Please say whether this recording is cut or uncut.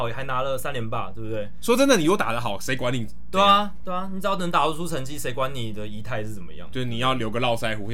uncut